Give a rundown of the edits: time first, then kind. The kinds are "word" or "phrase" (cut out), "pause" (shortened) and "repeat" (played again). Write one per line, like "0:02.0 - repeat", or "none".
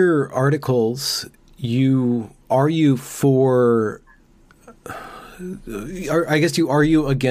none